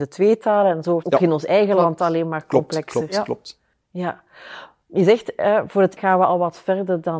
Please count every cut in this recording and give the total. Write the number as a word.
three